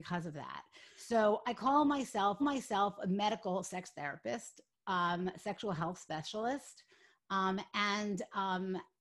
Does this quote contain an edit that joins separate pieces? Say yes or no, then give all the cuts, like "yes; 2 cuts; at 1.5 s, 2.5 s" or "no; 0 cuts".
yes; 1 cut; at 2.4 s